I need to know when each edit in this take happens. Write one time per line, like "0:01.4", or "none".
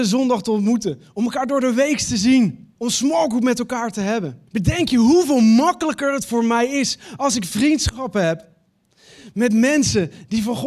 0:02.7
0:04.5